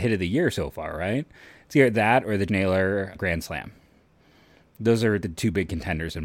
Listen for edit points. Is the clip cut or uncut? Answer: cut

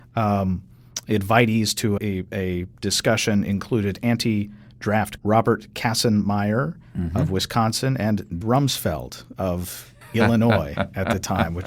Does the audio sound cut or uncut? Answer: cut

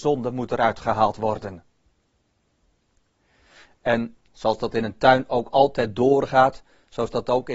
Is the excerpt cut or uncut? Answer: uncut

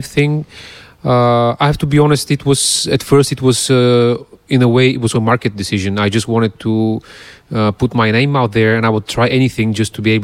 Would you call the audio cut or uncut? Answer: cut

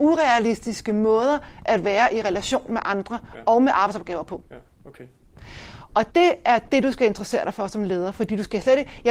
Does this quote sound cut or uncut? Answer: cut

